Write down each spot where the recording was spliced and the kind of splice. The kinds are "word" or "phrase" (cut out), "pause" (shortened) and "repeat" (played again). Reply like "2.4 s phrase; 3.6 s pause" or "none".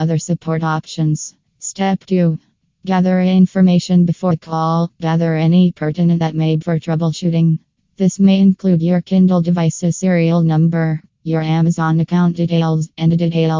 4.3 s word; 6.2 s word; 6.6 s word

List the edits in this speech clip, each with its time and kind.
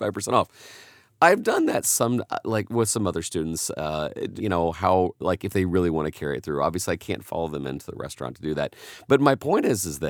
4.4 s phrase

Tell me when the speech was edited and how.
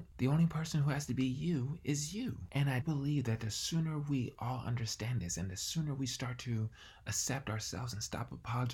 2.8 s word

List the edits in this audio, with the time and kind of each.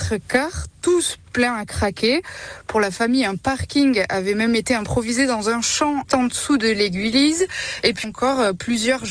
6.1 s word; 8.0 s word

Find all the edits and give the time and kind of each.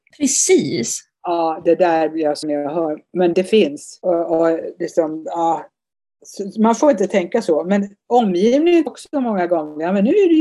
2.4 s word; 3.3 s word; 8.9 s phrase

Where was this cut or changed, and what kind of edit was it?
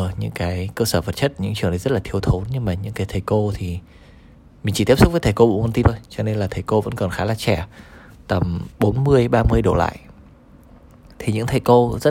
5.8 s word; 8.7 s pause

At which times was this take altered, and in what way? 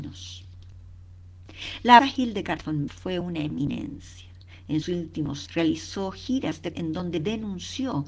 2.0 s word; 2.9 s word; 4.8 s word; 5.5 s word; 6.7 s word

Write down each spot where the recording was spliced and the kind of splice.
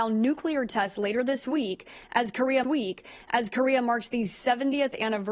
2.6 s repeat

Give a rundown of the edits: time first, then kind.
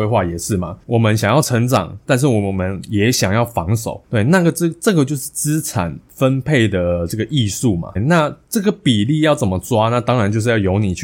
8.0 s word

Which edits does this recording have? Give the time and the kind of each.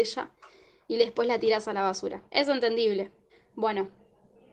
2.3 s pause; 3.3 s pause

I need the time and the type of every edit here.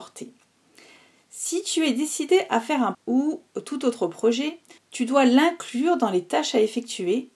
2.9 s word; 4.8 s pause

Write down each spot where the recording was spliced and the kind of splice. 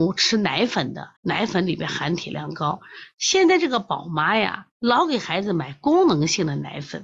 1.2 s pause; 4.7 s pause

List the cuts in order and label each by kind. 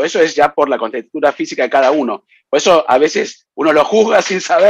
none

